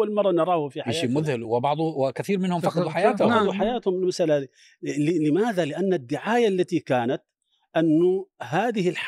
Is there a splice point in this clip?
no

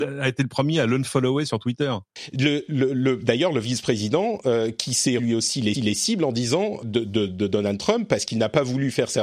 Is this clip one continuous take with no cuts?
no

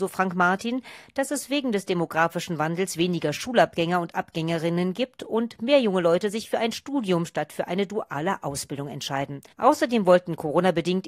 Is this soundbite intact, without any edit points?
no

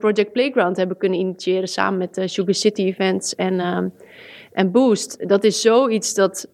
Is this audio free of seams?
yes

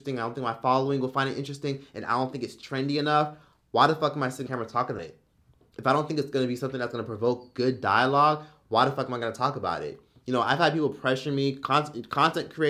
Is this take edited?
yes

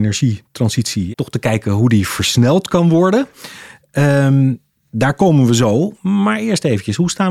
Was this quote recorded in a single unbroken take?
no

